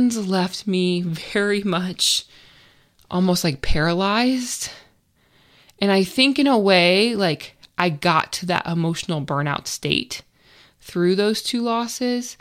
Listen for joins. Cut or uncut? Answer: uncut